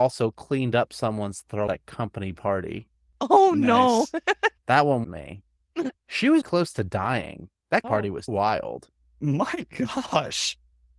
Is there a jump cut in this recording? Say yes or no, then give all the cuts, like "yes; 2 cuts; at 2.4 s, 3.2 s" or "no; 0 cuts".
yes; 8 cuts; at 1.7 s, 2.9 s, 4.6 s, 5.0 s, 5.9 s, 6.4 s, 7.8 s, 8.3 s